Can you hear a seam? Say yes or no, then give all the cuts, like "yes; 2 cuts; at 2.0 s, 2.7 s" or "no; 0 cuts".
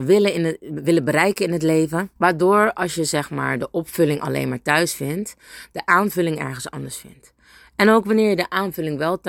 yes; 1 cut; at 2.2 s